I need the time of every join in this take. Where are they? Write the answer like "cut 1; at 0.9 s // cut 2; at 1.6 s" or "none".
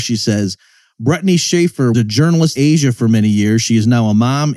cut 1; at 1.9 s // cut 2; at 2.6 s